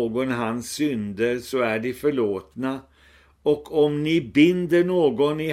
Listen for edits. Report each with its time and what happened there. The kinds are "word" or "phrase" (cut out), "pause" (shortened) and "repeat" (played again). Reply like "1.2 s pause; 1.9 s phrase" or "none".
none